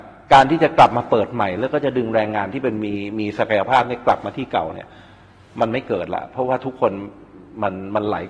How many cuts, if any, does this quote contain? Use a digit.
0